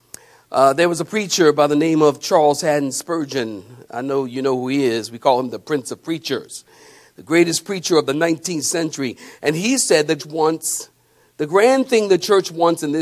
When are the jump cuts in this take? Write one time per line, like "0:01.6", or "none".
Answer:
0:10.2